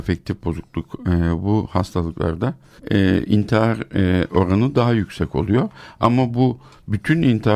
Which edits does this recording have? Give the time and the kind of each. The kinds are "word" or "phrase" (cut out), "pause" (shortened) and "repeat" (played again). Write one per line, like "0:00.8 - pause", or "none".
0:02.8 - pause